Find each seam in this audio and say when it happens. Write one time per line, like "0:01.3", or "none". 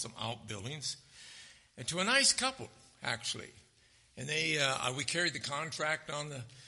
none